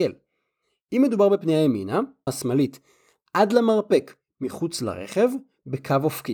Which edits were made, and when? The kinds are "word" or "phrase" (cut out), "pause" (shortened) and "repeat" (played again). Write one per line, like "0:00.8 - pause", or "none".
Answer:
0:02.3 - phrase